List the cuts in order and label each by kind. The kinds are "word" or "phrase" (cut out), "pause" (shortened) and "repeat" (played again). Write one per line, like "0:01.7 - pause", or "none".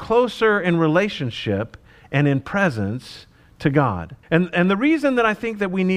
0:04.2 - pause